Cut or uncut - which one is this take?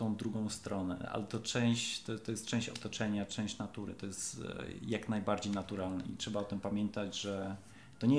uncut